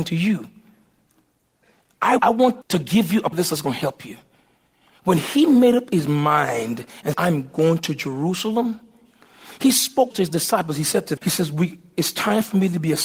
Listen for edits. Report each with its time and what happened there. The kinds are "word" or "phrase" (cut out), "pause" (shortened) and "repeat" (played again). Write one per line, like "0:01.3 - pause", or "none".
0:02.2 - word
0:02.6 - word
0:03.3 - word
0:07.1 - word
0:10.1 - word
0:11.2 - word